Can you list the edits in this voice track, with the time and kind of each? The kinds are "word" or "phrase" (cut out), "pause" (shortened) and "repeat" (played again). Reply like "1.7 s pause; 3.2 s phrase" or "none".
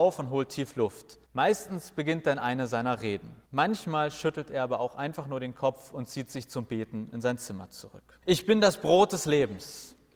1.2 s pause; 3.4 s pause; 8.2 s pause